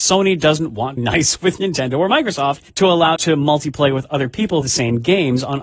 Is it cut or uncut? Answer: cut